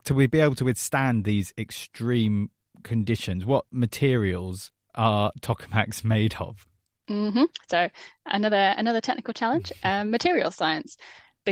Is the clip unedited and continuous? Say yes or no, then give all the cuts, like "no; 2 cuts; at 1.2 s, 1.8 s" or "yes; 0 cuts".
yes; 0 cuts